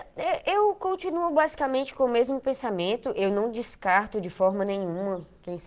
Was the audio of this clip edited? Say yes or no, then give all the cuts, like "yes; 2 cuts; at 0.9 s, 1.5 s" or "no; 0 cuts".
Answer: no; 0 cuts